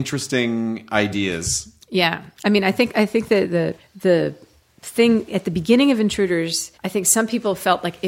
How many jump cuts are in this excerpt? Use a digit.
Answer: 2